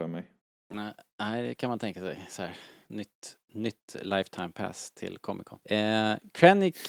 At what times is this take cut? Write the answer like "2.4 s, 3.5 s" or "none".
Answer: 3.4 s, 5.6 s